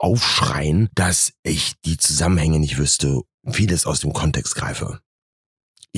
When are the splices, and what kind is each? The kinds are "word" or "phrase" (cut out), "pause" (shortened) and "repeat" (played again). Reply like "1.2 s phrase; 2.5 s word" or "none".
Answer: none

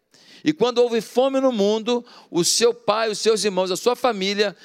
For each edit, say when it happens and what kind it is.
none

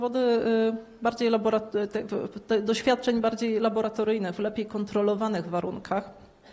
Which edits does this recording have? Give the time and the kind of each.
none

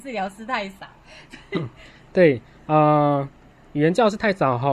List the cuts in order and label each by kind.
none

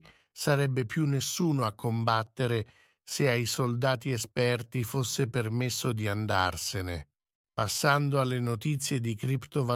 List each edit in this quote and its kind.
none

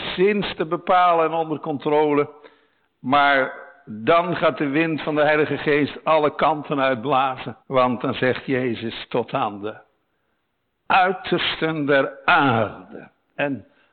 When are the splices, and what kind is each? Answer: 7.6 s pause

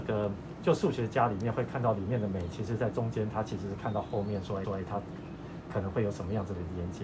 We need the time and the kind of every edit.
4.6 s repeat

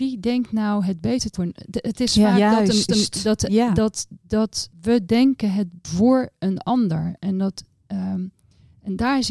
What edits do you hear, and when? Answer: 1.3 s word; 2.9 s repeat; 4.7 s pause; 5.8 s phrase

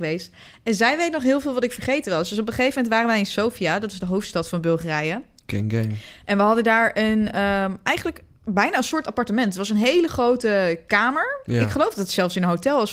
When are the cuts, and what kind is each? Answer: none

